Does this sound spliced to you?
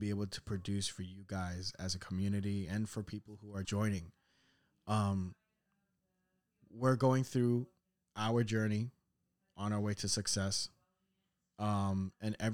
yes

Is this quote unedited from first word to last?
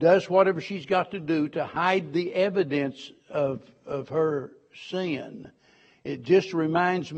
yes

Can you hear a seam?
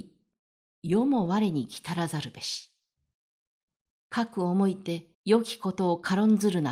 yes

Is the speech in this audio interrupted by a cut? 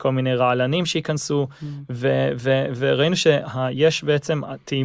no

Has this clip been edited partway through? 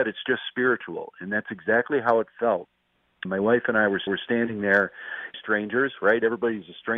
yes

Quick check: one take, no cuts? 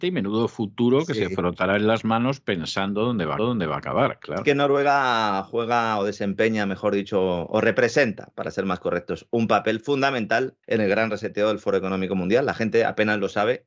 no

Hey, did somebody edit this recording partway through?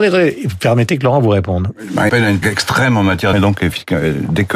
yes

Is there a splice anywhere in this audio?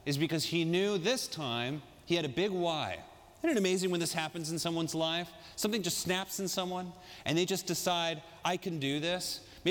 no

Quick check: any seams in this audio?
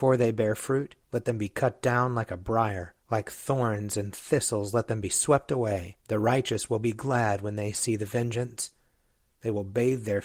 yes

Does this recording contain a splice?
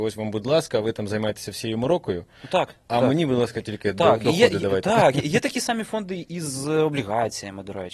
no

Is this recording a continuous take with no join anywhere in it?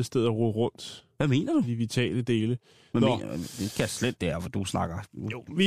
yes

